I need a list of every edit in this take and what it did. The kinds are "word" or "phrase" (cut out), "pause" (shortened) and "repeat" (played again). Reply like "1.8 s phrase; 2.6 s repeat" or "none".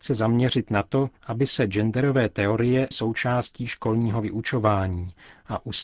2.9 s word